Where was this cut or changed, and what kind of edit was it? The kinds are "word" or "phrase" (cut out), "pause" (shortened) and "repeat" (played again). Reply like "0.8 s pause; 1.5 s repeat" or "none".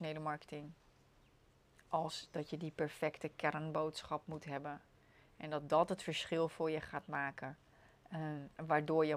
none